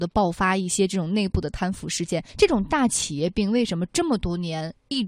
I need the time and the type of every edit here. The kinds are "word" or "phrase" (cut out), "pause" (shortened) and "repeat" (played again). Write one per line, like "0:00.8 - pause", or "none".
0:02.3 - pause